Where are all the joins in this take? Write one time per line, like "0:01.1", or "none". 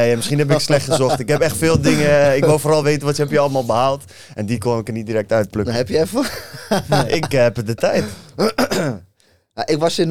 none